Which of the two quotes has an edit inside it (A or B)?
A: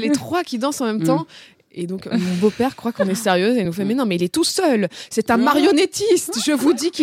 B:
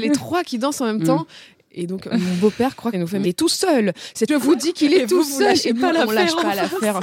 B